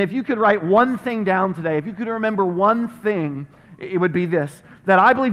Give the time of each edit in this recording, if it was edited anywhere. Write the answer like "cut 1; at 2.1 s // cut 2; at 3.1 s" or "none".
none